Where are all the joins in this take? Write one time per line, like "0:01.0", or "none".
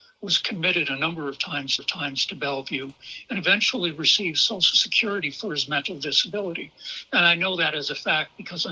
0:01.8